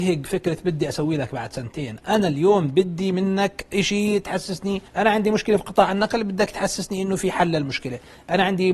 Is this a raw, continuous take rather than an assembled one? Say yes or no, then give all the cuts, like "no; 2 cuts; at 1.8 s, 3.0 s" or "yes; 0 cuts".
no; 1 cut; at 4.9 s